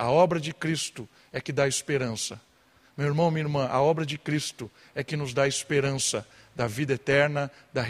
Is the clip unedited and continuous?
yes; 0 cuts

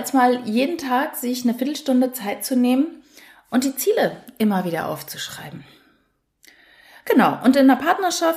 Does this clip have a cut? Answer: no; 0 cuts

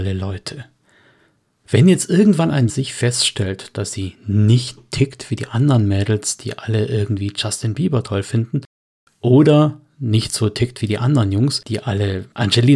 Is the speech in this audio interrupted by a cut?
yes; 2 cuts; at 2.7 s, 4.8 s

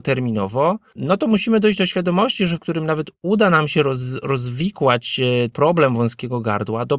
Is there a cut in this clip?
yes; 2 cuts; at 2.6 s, 5.5 s

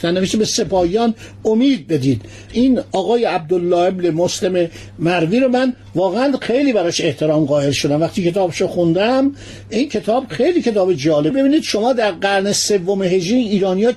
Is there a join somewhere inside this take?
no; 0 cuts

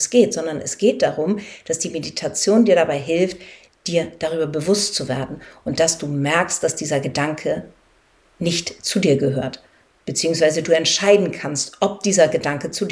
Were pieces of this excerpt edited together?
no; 0 cuts

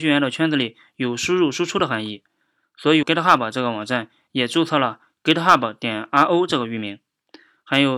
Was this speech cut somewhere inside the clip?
yes; 1 cut; at 3.0 s

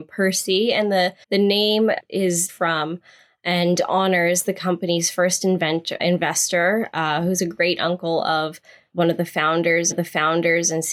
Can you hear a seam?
yes; 4 cuts; at 1.2 s, 2.5 s, 6.0 s, 9.9 s

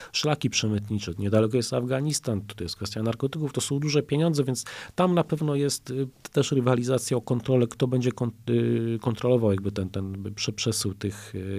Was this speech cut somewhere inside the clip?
no; 0 cuts

